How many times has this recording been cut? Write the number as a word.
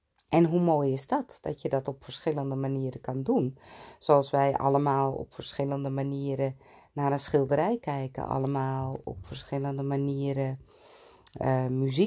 zero